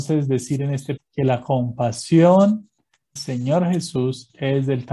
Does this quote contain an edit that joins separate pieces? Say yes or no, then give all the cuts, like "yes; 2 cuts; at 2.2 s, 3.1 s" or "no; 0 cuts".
yes; 2 cuts; at 1.0 s, 3.2 s